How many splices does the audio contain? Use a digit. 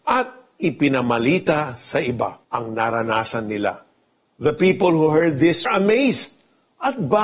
2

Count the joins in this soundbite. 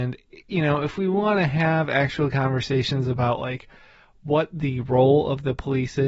0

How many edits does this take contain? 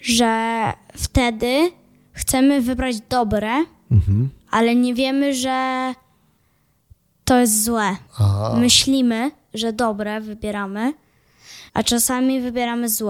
3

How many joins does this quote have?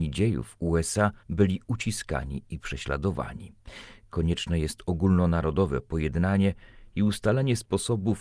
1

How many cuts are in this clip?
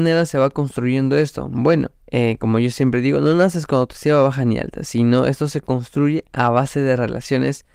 1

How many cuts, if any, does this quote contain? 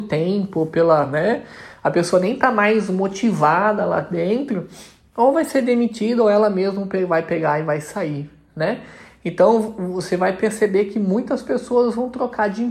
0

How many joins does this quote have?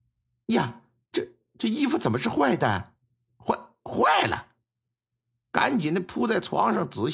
0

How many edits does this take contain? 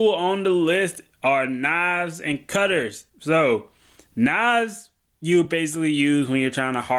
0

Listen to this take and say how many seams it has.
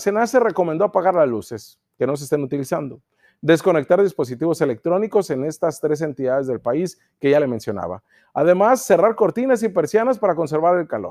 0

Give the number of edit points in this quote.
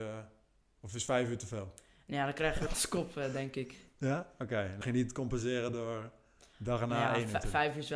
2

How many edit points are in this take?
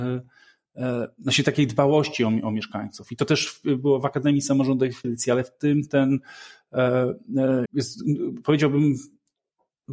2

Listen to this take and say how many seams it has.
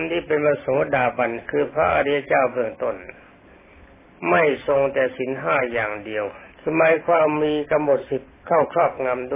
1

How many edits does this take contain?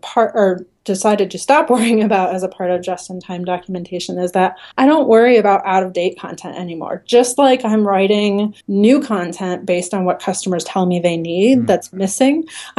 2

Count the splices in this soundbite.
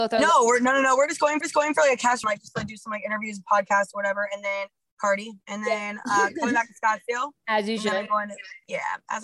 3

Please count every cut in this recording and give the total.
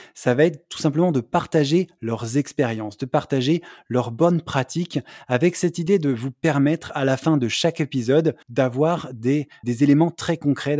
2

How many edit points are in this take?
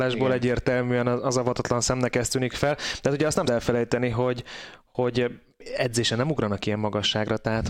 1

